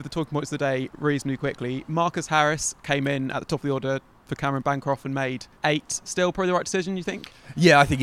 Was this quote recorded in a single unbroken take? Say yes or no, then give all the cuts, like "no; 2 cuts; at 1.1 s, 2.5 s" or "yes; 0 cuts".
no; 1 cut; at 5.5 s